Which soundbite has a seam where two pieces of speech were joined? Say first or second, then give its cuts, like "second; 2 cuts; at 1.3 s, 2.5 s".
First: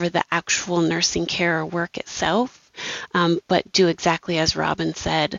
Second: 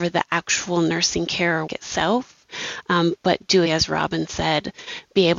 second; 2 cuts; at 1.7 s, 3.7 s